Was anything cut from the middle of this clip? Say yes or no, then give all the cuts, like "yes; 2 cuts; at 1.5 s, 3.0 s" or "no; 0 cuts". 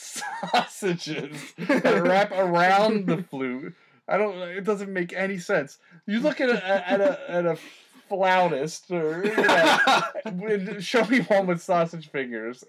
no; 0 cuts